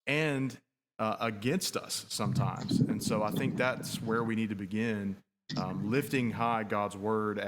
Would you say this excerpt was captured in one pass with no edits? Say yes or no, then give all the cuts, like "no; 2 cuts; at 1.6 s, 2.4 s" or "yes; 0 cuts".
yes; 0 cuts